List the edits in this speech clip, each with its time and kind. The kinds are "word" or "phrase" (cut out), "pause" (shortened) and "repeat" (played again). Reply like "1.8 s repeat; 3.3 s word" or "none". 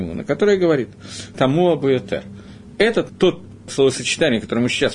1.3 s word; 3.1 s word; 3.7 s word

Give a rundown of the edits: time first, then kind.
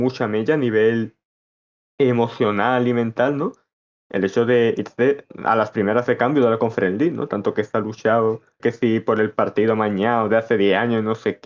8.6 s word

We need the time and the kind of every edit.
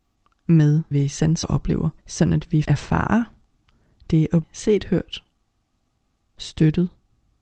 0.9 s word; 1.4 s word; 2.0 s pause; 2.6 s word; 4.4 s word

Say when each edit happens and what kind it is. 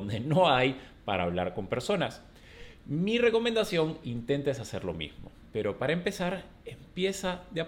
4.0 s phrase

